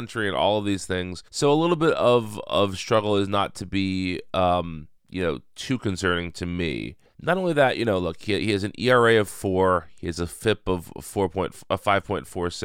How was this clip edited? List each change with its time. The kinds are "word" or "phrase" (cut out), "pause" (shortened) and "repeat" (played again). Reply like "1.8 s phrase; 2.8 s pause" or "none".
1.3 s pause; 5.0 s pause; 7.0 s pause